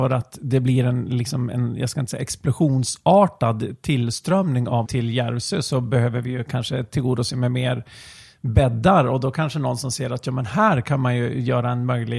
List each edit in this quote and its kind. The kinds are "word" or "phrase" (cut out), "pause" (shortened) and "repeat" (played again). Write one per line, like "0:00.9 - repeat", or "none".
0:04.8 - word